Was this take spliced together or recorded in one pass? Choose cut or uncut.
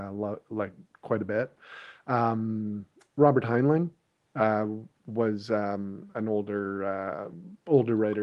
uncut